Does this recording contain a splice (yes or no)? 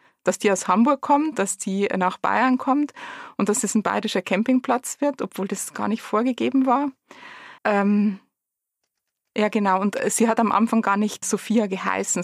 yes